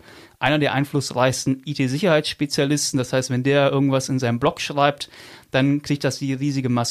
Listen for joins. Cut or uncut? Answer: uncut